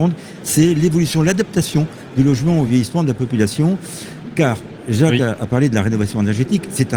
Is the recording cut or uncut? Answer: uncut